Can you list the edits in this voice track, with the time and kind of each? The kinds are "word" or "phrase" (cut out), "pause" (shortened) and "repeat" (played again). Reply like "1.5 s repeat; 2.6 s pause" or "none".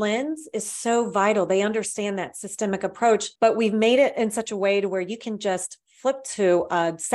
3.4 s pause